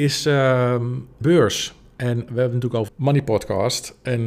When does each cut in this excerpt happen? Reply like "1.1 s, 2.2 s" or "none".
1.2 s, 2.3 s, 2.9 s